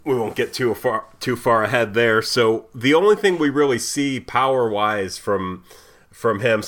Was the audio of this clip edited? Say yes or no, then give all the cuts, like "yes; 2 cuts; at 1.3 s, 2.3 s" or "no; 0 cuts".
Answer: no; 0 cuts